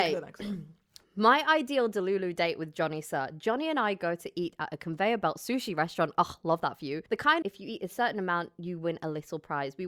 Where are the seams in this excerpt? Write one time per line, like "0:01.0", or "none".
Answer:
0:07.1
0:07.4